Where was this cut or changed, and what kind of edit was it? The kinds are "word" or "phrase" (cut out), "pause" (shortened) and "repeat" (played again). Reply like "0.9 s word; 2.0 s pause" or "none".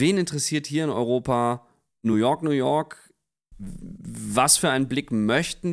none